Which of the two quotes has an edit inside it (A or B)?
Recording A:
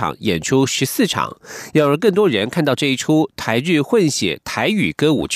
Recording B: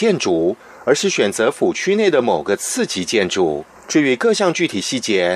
B